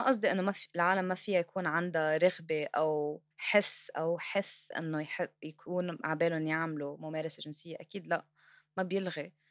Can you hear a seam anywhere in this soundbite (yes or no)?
yes